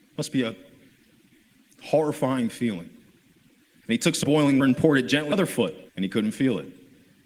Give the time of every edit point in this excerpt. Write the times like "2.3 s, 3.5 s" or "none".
4.2 s, 4.6 s, 5.3 s, 5.9 s